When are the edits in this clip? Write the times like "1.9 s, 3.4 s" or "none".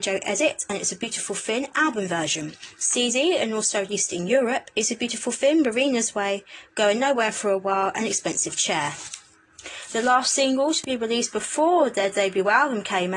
none

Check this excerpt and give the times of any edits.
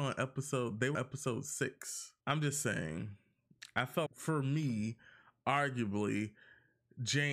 0.9 s, 2.2 s, 4.1 s

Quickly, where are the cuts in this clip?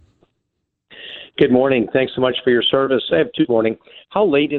3.5 s

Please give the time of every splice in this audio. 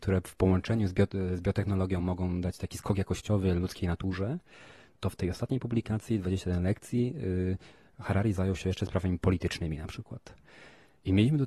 none

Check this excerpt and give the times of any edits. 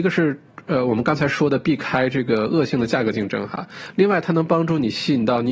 none

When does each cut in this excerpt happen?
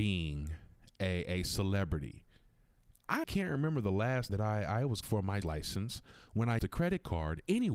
3.2 s, 4.3 s, 5.0 s, 5.4 s, 6.6 s

